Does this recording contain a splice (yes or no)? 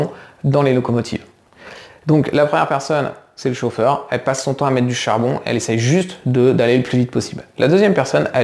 no